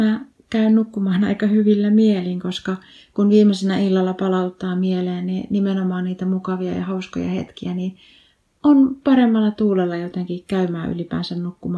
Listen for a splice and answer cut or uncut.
uncut